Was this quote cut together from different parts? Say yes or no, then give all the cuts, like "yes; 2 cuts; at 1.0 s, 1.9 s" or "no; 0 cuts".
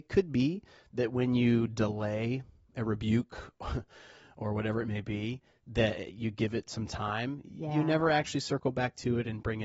no; 0 cuts